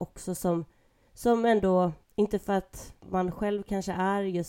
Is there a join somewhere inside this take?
yes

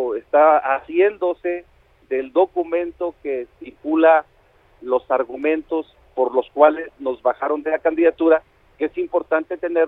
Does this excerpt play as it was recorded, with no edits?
yes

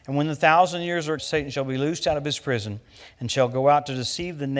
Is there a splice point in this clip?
yes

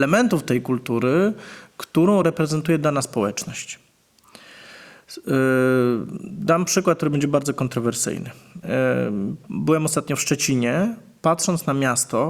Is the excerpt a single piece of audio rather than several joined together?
yes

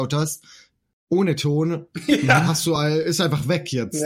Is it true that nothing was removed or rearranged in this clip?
yes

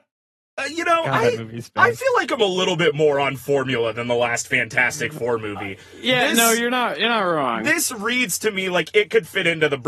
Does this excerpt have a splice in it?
no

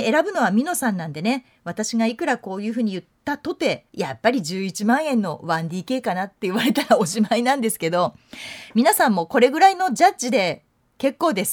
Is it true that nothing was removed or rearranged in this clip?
no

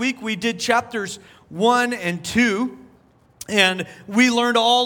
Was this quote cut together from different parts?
no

